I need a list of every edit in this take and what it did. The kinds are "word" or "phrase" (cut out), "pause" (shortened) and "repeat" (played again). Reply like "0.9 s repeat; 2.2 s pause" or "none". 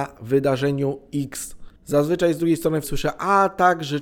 1.8 s pause; 2.8 s word

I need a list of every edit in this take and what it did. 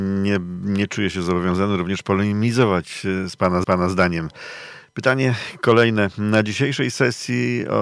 3.6 s repeat

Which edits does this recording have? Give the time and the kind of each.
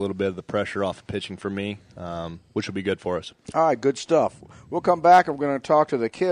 3.4 s pause

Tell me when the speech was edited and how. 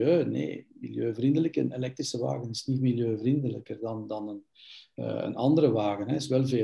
none

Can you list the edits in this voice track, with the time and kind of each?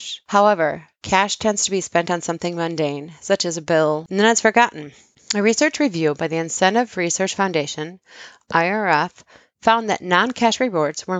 none

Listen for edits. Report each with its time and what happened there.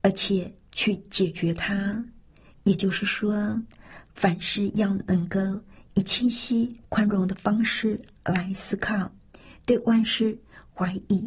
none

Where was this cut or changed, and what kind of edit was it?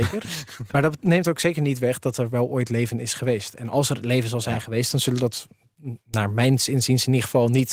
6.0 s pause

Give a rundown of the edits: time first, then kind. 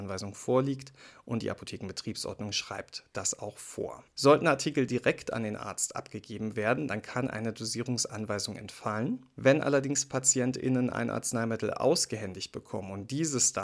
4.1 s pause

